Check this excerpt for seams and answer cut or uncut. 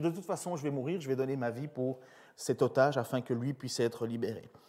uncut